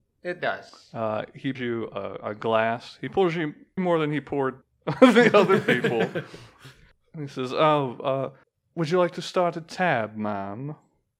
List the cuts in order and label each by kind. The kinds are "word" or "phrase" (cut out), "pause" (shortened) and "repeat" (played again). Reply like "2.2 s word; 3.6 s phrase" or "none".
1.5 s word; 3.8 s word; 4.6 s pause; 8.4 s pause